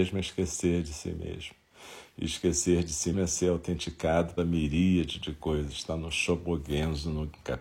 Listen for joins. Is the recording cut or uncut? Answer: cut